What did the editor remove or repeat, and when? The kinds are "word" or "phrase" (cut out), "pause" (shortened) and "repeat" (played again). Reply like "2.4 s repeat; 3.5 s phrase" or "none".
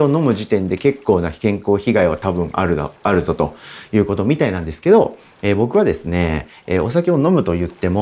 none